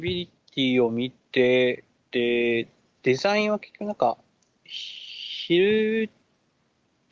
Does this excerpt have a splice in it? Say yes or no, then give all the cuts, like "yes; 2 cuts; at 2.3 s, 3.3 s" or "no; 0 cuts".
no; 0 cuts